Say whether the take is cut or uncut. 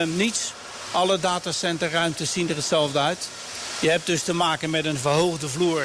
uncut